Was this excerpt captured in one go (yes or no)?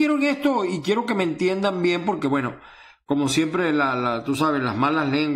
yes